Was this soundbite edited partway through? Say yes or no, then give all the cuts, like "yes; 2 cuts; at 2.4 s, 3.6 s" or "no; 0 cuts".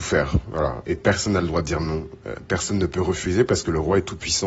no; 0 cuts